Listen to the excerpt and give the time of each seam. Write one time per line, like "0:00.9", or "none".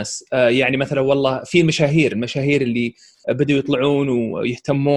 none

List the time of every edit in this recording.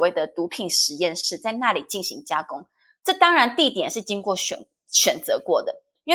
none

